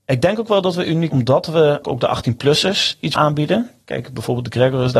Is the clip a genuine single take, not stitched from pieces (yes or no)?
no